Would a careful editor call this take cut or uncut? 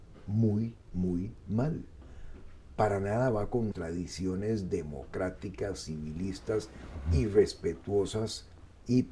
cut